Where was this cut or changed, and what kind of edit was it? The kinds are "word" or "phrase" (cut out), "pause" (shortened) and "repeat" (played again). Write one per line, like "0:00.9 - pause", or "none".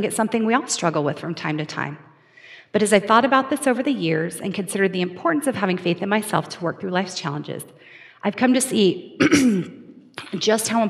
none